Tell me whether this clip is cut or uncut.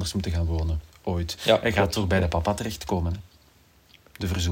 uncut